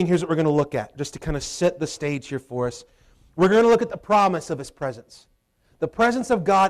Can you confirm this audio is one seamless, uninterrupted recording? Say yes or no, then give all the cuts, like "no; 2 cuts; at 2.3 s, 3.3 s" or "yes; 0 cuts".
yes; 0 cuts